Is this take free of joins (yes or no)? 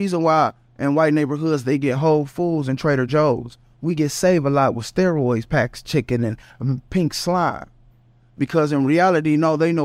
yes